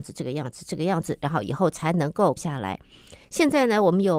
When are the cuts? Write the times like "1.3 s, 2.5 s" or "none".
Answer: 2.4 s, 3.2 s